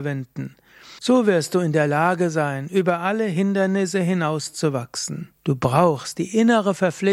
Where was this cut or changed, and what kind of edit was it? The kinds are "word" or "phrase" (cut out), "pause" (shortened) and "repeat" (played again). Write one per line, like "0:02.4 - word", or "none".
0:01.0 - pause
0:05.4 - pause